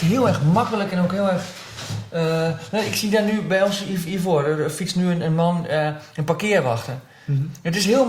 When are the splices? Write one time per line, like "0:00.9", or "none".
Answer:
none